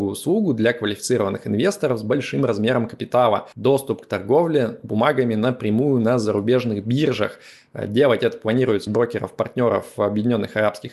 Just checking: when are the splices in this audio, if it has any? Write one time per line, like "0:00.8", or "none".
0:03.5
0:08.9